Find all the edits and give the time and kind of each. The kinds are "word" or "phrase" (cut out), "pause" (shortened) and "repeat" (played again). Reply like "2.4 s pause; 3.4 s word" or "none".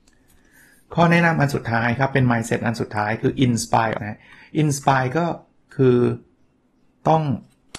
4.0 s word

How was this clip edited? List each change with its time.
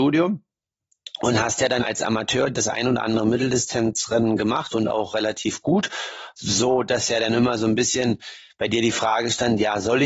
1.8 s phrase

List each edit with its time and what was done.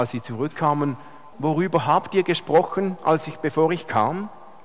1.3 s word

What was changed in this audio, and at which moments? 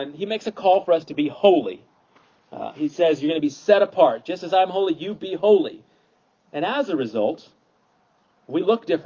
none

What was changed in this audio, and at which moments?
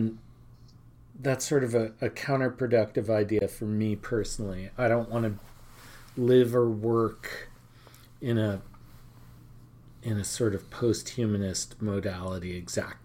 none

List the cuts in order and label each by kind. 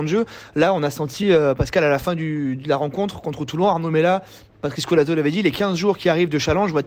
none

